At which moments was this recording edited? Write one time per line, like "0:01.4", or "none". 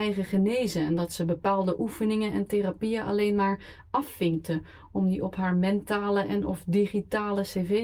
none